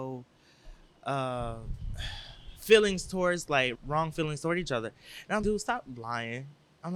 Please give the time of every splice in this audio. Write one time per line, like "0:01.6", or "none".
0:03.7
0:05.4